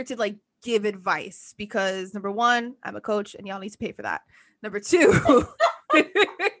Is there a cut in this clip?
no; 0 cuts

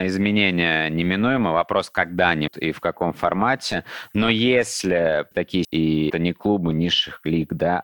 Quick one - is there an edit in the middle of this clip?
yes; 4 cuts; at 2.5 s, 5.3 s, 5.6 s, 6.1 s

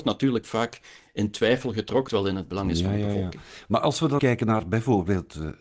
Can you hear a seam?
yes; 2 cuts; at 2.1 s, 4.2 s

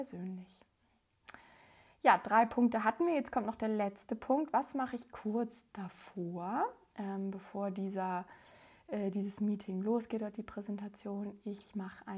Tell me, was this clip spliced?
no; 0 cuts

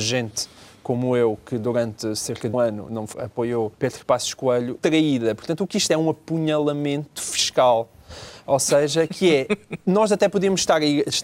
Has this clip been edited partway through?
yes; 5 cuts; at 2.5 s, 3.1 s, 3.7 s, 4.8 s, 5.9 s

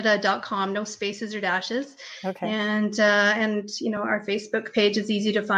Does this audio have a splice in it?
no; 0 cuts

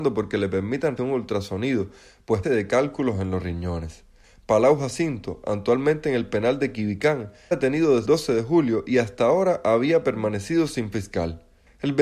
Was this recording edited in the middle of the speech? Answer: yes; 5 cuts; at 1.0 s, 2.4 s, 7.5 s, 8.0 s, 10.9 s

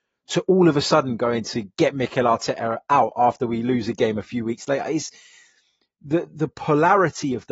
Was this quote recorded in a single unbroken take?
yes; 0 cuts

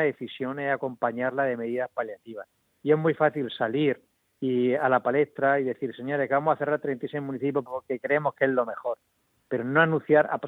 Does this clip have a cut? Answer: no; 0 cuts

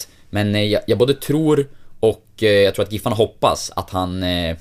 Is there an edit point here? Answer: no; 0 cuts

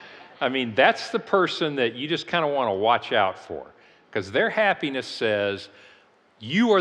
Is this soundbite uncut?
yes; 0 cuts

